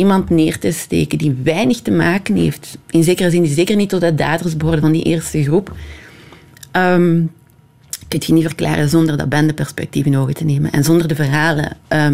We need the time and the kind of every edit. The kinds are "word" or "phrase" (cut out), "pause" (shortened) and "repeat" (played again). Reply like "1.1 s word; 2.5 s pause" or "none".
none